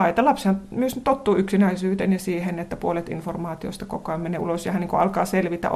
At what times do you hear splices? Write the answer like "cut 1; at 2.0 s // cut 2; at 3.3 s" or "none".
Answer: none